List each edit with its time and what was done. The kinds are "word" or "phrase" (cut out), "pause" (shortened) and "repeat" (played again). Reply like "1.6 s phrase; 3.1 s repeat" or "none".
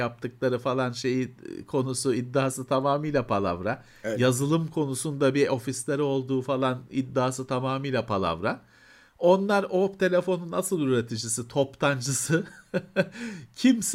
none